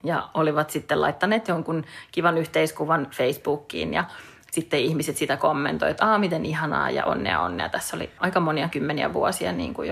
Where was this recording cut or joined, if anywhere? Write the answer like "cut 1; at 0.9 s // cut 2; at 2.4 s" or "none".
cut 1; at 8.2 s